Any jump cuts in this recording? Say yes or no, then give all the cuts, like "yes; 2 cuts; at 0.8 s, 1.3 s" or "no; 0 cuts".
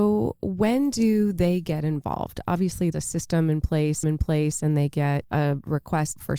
yes; 2 cuts; at 2.9 s, 4.0 s